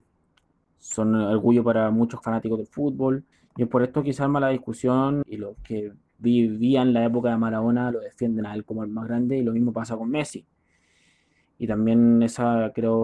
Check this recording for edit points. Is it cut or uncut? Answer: cut